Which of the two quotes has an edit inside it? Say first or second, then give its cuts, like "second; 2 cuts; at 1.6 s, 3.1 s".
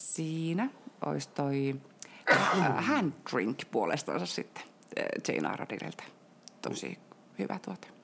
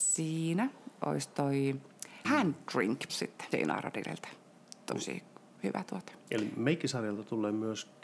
second; 4 cuts; at 2.2 s, 3.1 s, 3.5 s, 6.2 s